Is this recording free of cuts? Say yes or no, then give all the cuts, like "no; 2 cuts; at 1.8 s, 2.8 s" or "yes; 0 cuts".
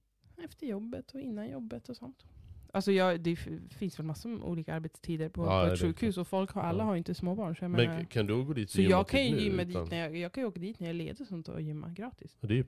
yes; 0 cuts